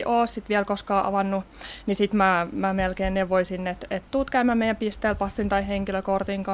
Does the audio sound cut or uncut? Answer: uncut